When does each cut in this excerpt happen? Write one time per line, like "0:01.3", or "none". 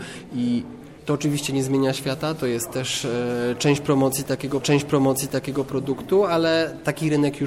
0:01.0
0:04.6